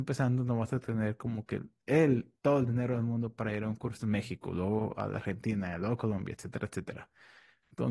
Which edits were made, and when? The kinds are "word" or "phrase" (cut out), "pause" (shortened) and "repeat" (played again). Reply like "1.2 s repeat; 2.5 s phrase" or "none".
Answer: 2.4 s pause